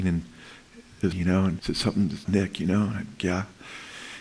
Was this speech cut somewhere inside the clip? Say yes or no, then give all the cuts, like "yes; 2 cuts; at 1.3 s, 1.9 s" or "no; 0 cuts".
yes; 4 cuts; at 1.1 s, 1.6 s, 2.2 s, 3.2 s